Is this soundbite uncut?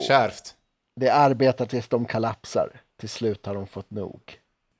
yes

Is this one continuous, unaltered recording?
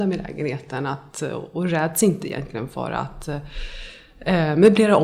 yes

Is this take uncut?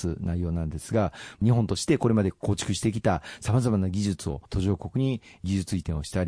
no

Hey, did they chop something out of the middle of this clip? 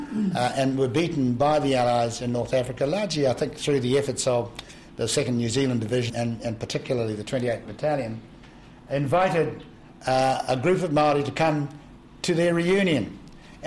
yes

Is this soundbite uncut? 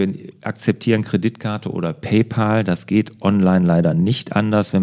yes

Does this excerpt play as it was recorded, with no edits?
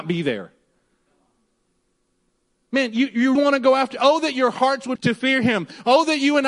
no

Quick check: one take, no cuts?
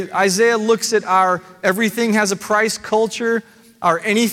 yes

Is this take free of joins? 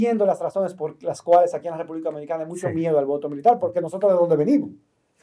yes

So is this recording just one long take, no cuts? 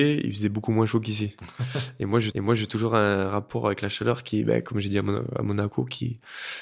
no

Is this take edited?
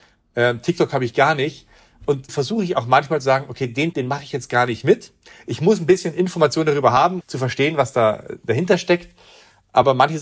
yes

